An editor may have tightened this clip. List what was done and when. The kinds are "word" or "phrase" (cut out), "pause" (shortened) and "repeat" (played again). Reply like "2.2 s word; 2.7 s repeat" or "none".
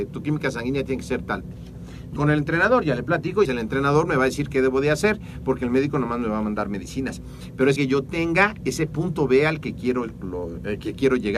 2.2 s word; 3.4 s word; 7.8 s word; 8.6 s word